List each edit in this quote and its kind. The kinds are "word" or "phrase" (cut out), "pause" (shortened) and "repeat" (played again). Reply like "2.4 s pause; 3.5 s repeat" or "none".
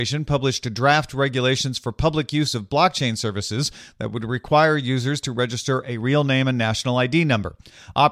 none